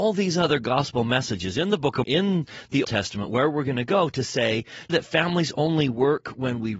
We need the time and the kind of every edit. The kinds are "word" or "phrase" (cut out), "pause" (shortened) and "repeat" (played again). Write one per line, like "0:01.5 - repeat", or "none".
0:02.0 - word
0:02.8 - word
0:04.9 - phrase